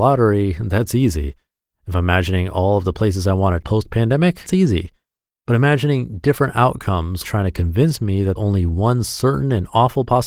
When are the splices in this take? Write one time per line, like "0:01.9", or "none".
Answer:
0:03.6
0:04.5
0:07.2
0:08.4